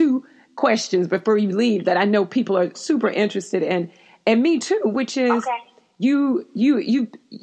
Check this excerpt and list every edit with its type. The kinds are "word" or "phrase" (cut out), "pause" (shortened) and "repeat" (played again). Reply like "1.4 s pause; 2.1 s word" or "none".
none